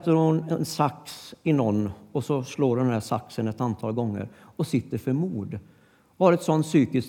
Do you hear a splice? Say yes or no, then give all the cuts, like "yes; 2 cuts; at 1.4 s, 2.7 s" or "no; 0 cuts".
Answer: no; 0 cuts